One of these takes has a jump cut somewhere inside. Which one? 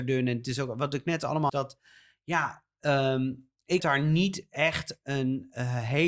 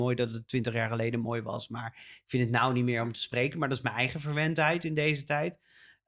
first; 2 cuts; at 1.5 s, 3.8 s

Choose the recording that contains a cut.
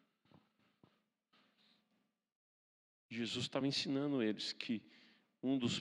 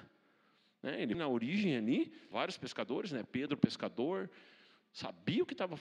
second; 2 cuts; at 1.1 s, 2.3 s

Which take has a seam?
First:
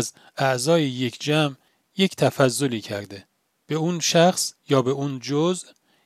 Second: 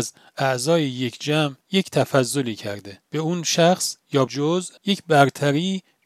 second; 4 cuts; at 1.6 s, 3.1 s, 4.3 s, 4.8 s

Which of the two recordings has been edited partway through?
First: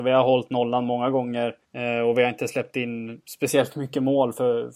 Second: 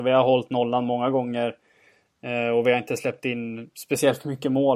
first; 1 cut; at 1.6 s

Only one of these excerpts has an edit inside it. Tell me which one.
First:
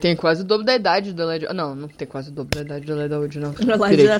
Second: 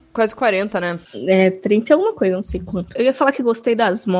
second; 1 cut; at 1.0 s

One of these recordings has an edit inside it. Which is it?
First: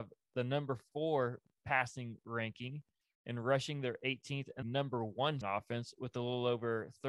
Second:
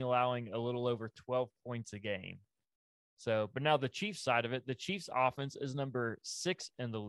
first; 3 cuts; at 1.6 s, 4.6 s, 5.4 s

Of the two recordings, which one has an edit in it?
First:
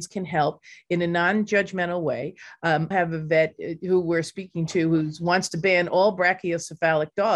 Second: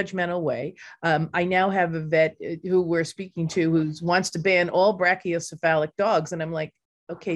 first; 1 cut; at 2.9 s

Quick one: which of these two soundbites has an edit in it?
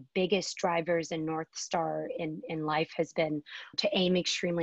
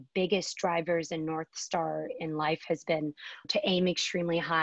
second; 1 cut; at 2.1 s

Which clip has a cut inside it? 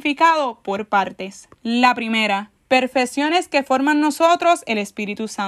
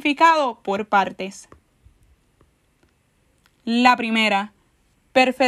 first; 2 cuts; at 1.5 s, 2.6 s

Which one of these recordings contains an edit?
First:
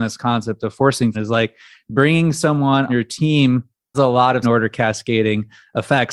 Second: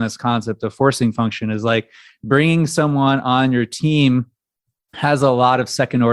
first; 4 cuts; at 1.1 s, 2.9 s, 3.9 s, 4.4 s

